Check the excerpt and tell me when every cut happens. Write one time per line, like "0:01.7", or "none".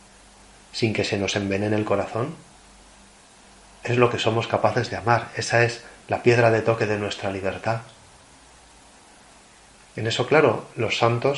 none